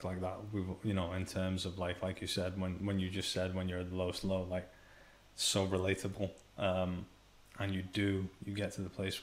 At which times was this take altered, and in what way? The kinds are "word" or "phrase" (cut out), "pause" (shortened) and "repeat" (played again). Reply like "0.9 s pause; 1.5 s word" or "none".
none